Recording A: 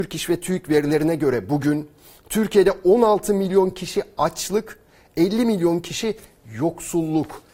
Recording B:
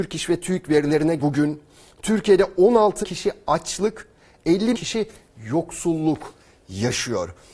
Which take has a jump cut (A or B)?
B